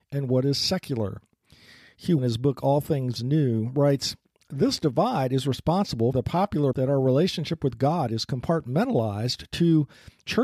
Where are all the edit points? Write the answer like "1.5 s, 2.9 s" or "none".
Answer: 2.2 s, 6.1 s, 6.7 s